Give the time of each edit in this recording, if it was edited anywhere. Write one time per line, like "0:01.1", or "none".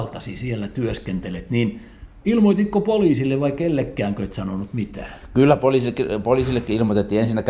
none